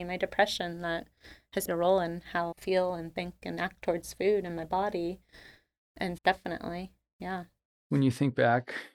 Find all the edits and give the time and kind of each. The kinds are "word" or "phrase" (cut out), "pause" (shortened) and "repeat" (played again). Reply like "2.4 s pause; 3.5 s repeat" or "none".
1.7 s word; 2.5 s word; 6.2 s word